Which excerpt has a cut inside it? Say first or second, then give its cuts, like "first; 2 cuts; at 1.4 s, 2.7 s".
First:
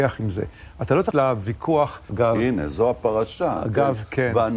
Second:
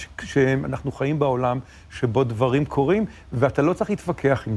first; 2 cuts; at 1.1 s, 2.1 s